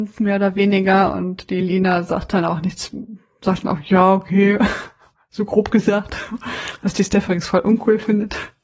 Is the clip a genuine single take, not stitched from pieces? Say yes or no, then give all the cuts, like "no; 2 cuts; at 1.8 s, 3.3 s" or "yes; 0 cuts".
yes; 0 cuts